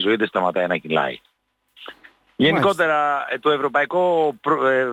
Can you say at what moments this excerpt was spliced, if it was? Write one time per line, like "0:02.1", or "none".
none